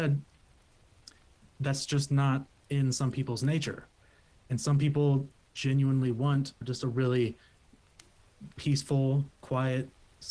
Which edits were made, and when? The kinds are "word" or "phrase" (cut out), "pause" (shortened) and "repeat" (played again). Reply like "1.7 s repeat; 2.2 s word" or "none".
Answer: none